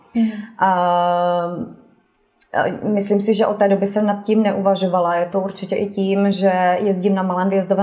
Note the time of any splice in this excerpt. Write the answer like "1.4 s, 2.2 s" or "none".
none